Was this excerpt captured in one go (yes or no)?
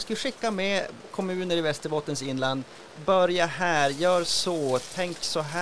no